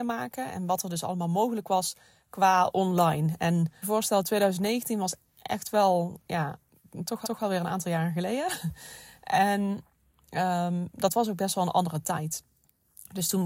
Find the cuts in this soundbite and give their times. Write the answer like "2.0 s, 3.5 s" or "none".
3.8 s, 7.2 s